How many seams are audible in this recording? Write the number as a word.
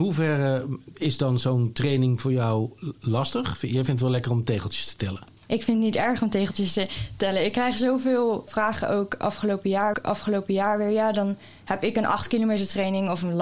three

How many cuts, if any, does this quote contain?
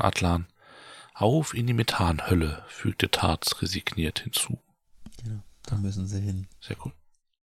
zero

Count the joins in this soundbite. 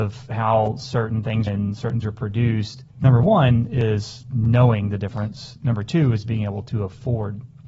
three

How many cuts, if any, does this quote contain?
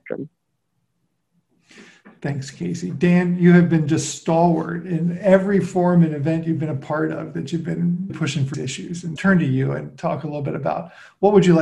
three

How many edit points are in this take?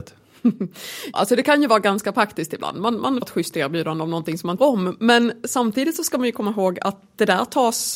three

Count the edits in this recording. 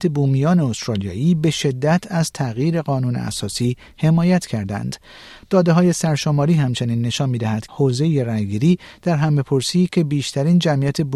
one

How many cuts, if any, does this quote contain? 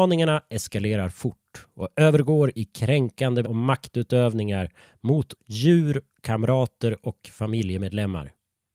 two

